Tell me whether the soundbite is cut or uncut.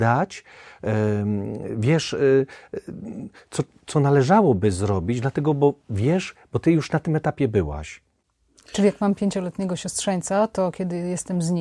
cut